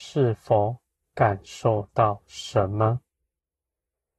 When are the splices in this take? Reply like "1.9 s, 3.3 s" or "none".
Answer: 1.0 s

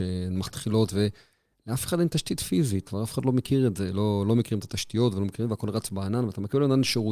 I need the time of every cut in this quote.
2.9 s

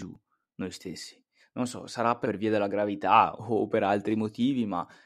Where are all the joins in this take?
1.4 s, 2.2 s, 3.4 s

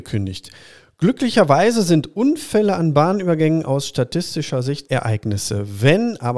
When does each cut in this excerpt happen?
4.8 s

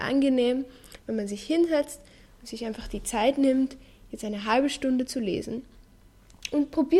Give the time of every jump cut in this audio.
none

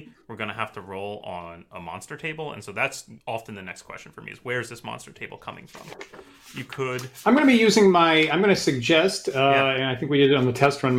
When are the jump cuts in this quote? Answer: 3.2 s

